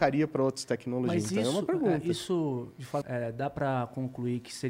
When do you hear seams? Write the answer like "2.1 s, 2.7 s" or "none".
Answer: 3.0 s